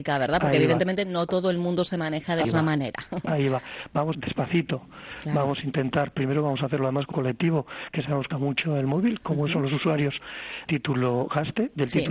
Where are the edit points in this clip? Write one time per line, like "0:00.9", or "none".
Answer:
0:02.4
0:04.1
0:07.1
0:08.3
0:10.7